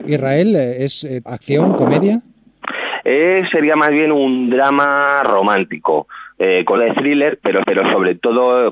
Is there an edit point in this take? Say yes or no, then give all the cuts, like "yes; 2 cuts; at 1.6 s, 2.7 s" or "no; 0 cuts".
yes; 4 cuts; at 1.3 s, 3.5 s, 6.8 s, 7.6 s